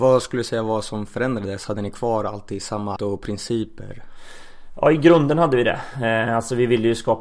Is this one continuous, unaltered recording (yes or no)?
no